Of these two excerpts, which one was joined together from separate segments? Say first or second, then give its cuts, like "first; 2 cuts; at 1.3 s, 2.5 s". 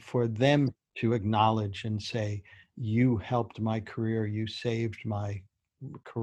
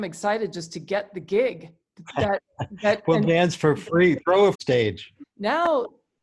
second; 1 cut; at 4.5 s